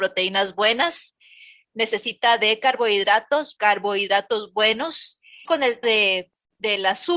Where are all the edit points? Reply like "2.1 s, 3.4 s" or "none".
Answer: 3.6 s, 5.4 s, 5.8 s

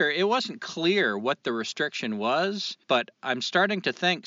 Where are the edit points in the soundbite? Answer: 2.8 s

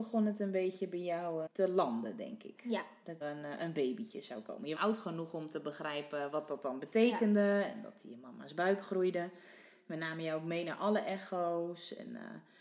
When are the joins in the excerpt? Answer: 1.5 s, 3.2 s, 4.8 s

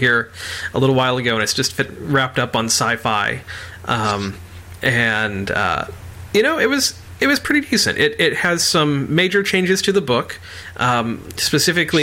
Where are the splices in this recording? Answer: none

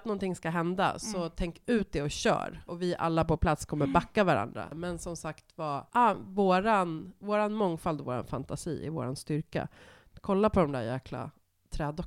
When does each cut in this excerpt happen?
none

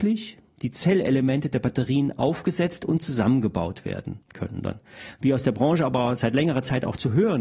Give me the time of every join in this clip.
4.2 s

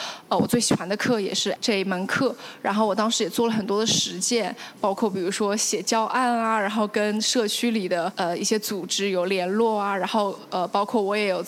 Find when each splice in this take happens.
1.6 s

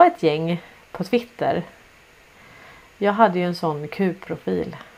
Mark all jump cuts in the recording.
none

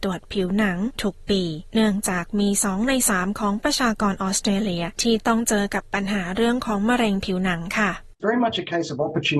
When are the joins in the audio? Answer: 8.2 s

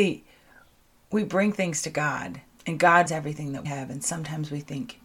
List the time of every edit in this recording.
2.5 s, 3.1 s, 3.6 s

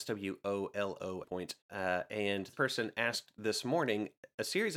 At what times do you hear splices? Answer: 1.2 s, 1.6 s, 2.5 s

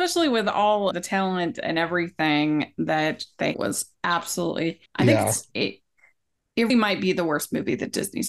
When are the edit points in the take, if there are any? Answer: 0.9 s, 3.5 s, 4.9 s, 6.7 s

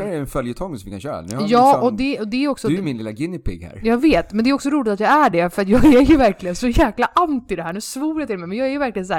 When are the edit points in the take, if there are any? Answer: none

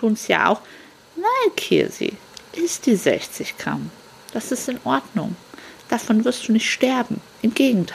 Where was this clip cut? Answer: none

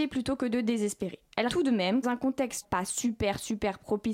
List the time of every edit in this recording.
1.5 s, 2.0 s, 2.6 s

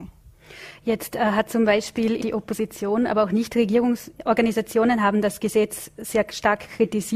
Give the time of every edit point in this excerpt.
2.2 s

